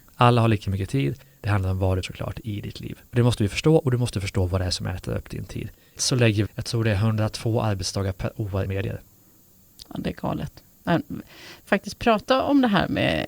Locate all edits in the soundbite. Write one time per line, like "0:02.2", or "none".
0:02.0
0:03.1
0:06.0
0:06.5
0:08.6
0:11.7